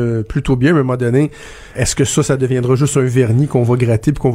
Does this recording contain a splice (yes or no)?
yes